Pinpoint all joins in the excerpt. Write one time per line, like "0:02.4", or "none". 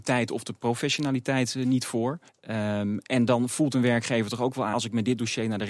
0:02.3
0:04.7